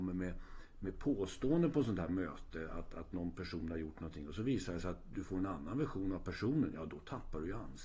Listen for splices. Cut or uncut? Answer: uncut